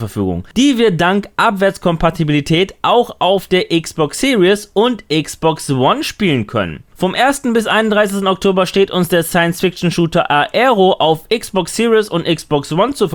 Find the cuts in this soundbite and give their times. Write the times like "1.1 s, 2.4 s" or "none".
none